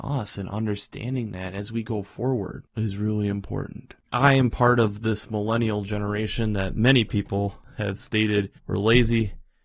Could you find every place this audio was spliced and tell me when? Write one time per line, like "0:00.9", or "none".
0:08.6